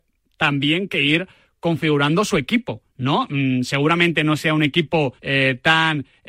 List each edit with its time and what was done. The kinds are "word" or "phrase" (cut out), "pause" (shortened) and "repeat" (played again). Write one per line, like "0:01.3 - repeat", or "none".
0:05.2 - pause